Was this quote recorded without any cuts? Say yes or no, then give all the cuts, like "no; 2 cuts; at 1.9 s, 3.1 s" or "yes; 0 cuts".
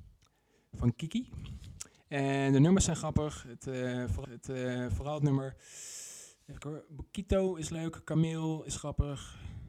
no; 2 cuts; at 4.2 s, 6.6 s